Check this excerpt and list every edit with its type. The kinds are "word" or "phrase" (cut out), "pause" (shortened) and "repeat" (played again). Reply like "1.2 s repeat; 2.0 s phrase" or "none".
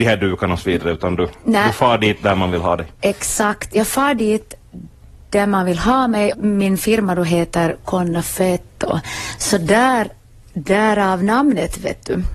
6.3 s word